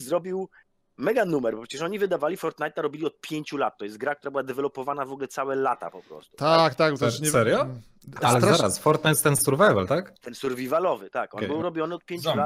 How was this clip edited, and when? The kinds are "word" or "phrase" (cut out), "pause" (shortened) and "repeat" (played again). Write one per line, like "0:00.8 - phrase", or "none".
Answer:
none